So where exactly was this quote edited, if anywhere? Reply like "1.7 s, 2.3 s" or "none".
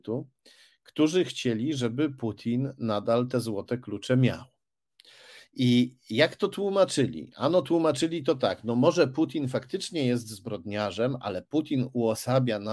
none